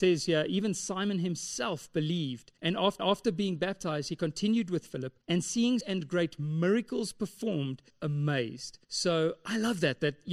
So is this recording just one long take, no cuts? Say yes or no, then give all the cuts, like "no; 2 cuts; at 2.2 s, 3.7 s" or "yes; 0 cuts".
no; 6 cuts; at 2.6 s, 3.0 s, 5.2 s, 5.8 s, 7.9 s, 8.8 s